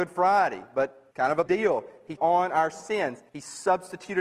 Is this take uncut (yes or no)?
no